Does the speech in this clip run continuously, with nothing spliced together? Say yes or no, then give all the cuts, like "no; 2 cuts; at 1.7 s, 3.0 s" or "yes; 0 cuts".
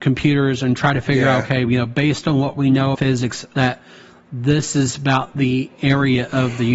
no; 1 cut; at 2.9 s